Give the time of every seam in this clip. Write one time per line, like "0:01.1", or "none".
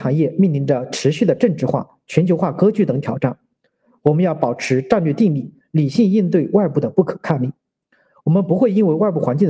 none